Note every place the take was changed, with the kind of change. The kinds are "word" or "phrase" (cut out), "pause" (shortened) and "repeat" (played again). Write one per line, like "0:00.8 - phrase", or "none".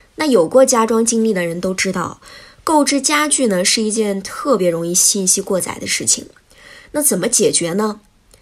none